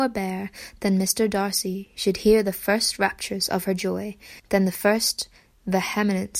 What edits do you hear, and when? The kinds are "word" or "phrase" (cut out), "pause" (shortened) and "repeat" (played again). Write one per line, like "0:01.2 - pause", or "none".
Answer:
0:04.4 - pause